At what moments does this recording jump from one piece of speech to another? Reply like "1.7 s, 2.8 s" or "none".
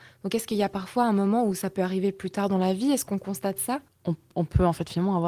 3.9 s